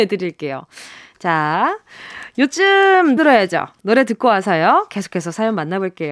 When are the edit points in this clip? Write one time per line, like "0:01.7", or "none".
0:03.2

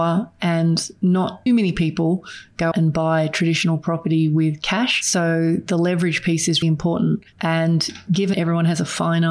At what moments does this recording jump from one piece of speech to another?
0:01.5
0:02.7
0:06.6
0:08.3

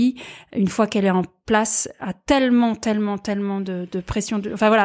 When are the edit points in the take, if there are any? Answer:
none

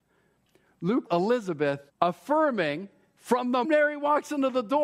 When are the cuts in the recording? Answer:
0:01.1
0:01.9
0:03.6

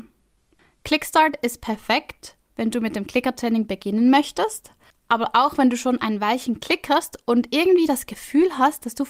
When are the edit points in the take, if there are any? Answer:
none

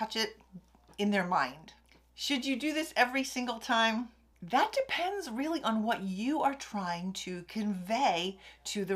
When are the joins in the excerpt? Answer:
none

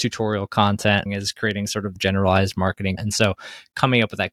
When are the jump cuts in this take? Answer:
0:01.1
0:02.0
0:03.0

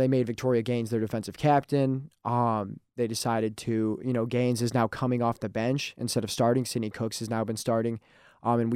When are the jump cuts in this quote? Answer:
none

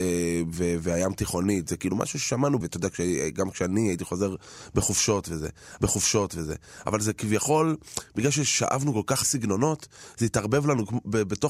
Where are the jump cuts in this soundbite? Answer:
0:02.6
0:05.8
0:09.2

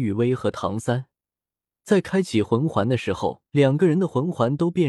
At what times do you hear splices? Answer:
0:03.5

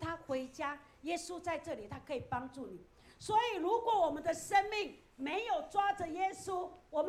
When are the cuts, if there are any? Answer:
none

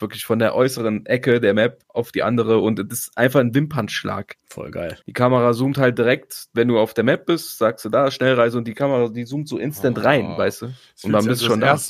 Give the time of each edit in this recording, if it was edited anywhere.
0:01.8
0:04.4
0:05.0

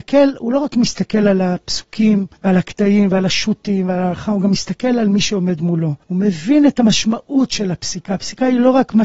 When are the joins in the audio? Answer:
0:02.4
0:06.0

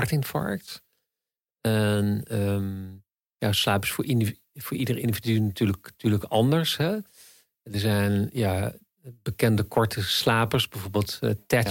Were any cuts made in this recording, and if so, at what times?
none

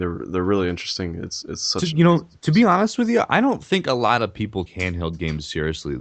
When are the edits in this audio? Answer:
0:01.4
0:04.7

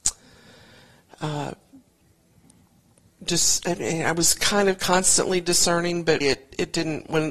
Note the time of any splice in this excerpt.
0:06.2

